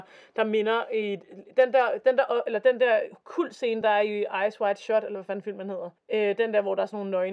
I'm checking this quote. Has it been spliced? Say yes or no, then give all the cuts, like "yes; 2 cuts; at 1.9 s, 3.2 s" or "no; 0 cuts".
no; 0 cuts